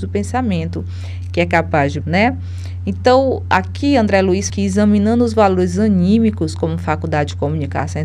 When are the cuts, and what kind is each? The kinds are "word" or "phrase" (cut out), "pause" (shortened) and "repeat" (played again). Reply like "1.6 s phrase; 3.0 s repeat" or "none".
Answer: 2.0 s word; 4.5 s word